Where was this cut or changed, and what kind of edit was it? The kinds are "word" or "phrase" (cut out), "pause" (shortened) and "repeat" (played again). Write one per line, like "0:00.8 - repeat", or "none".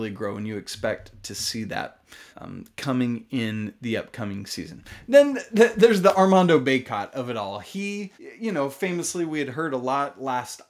0:02.3 - pause
0:08.1 - pause